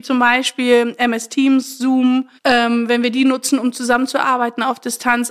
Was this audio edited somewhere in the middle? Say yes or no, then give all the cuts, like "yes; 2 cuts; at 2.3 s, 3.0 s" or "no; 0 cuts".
yes; 1 cut; at 2.4 s